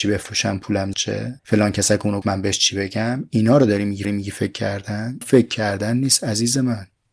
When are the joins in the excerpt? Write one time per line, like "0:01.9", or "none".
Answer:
0:00.9
0:01.4
0:02.2
0:04.0
0:05.2